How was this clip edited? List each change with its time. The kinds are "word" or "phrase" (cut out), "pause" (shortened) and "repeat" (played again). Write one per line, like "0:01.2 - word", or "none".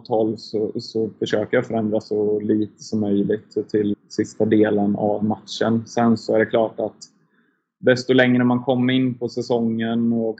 0:03.9 - word

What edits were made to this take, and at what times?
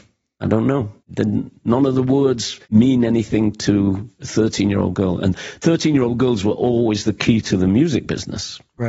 0:01.0 - pause
0:02.6 - pause

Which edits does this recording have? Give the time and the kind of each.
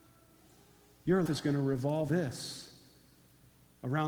0:01.3 - word
0:02.1 - word

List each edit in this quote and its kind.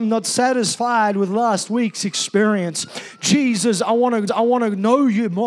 0:04.3 - repeat

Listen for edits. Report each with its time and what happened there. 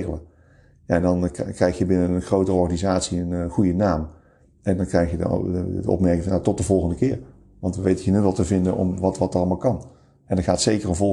none

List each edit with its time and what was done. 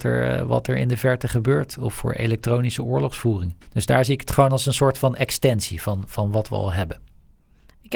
0:03.6 - pause

